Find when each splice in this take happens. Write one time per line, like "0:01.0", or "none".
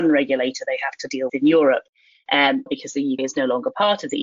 0:01.3
0:02.7
0:03.2